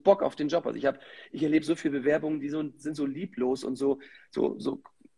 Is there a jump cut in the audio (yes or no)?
no